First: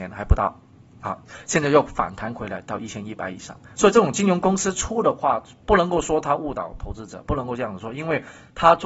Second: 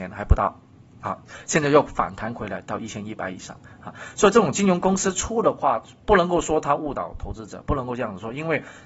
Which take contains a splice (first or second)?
first